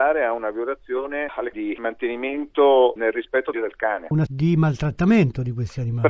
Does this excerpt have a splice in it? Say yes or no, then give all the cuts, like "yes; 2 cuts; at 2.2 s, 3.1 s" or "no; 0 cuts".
yes; 3 cuts; at 1.5 s, 3.5 s, 4.3 s